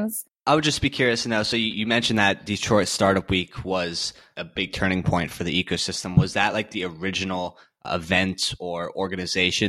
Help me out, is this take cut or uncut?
uncut